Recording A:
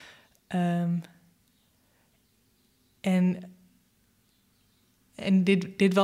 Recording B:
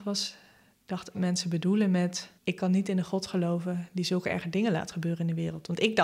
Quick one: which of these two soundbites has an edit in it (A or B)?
B